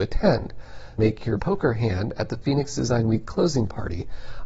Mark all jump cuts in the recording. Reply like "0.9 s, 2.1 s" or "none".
1.0 s, 1.4 s

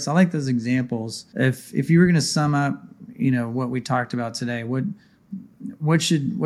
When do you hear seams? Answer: 1.3 s

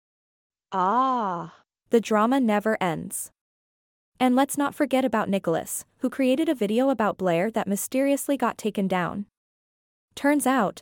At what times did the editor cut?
none

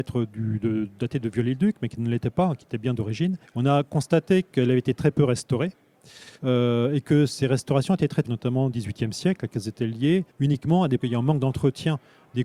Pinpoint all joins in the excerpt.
3.4 s, 4.9 s, 6.4 s, 8.2 s, 8.7 s, 10.3 s, 11.0 s

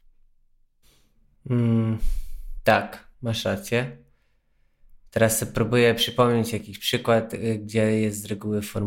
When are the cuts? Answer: 3.1 s, 5.1 s

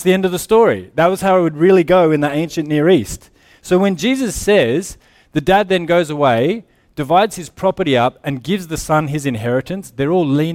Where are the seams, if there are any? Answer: none

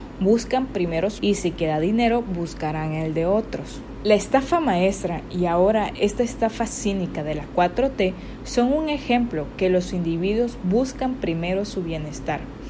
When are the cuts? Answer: 1.2 s

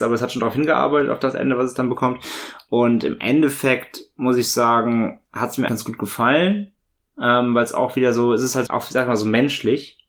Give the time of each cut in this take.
5.7 s, 8.7 s

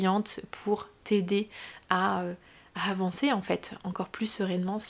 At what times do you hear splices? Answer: none

